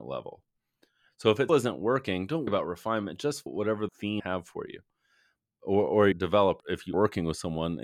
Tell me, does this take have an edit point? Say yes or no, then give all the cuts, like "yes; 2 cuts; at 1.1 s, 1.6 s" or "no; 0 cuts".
yes; 8 cuts; at 1.5 s, 2.5 s, 3.5 s, 3.9 s, 4.2 s, 6.1 s, 6.6 s, 6.9 s